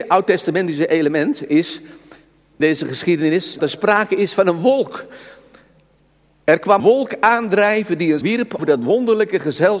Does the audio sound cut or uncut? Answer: cut